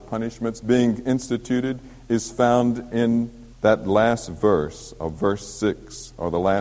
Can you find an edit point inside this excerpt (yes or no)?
yes